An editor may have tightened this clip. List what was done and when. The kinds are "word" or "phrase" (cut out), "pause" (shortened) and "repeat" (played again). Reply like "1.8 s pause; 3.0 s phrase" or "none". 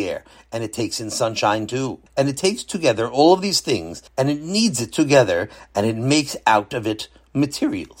2.1 s pause; 4.1 s pause